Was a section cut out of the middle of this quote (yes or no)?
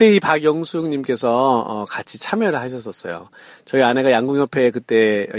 no